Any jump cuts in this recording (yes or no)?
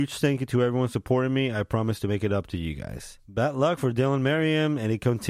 no